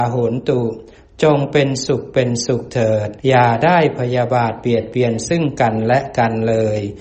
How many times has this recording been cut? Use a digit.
1